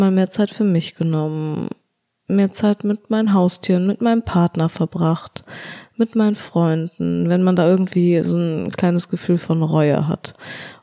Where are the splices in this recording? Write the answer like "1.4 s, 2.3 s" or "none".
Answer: none